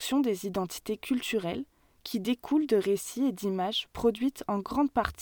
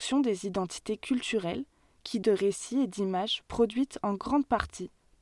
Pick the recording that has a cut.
second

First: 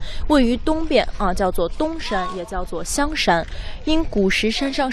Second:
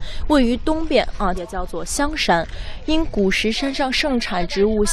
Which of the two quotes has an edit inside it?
second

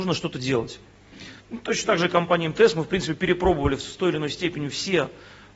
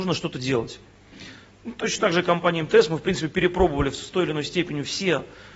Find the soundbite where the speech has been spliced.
first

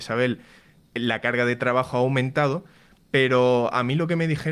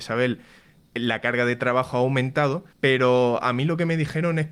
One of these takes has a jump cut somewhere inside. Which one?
second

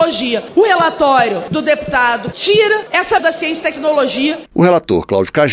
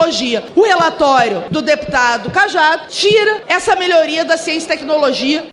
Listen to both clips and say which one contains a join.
first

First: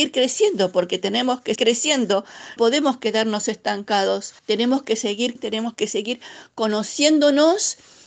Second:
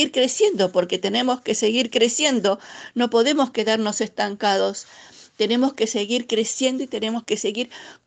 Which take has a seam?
first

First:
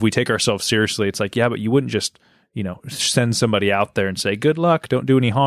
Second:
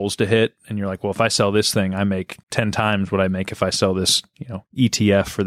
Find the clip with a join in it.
second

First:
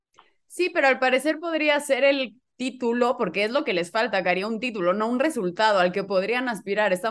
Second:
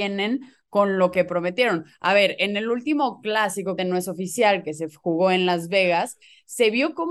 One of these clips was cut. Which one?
second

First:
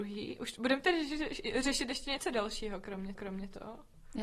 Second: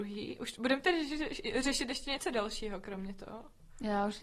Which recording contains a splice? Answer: first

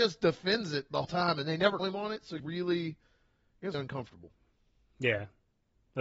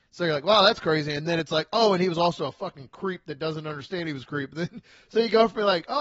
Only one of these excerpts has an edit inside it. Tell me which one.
first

